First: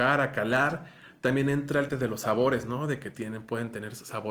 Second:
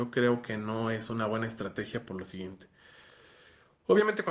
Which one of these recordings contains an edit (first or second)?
first